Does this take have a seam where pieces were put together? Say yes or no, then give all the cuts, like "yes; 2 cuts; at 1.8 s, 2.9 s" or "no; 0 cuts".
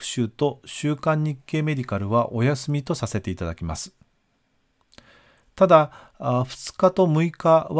no; 0 cuts